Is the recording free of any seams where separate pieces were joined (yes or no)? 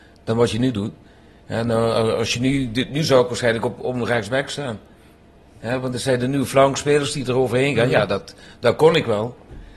yes